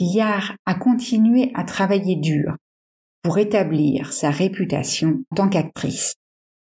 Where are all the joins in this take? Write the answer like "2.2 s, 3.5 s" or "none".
5.3 s